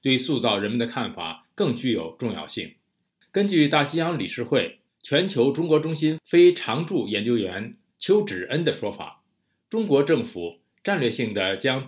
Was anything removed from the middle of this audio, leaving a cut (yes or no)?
no